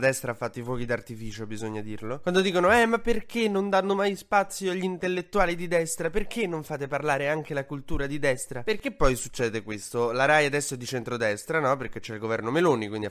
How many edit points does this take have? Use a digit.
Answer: 0